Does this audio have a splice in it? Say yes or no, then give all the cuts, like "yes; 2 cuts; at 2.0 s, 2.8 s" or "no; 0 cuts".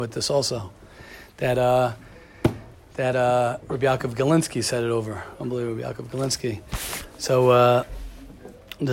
no; 0 cuts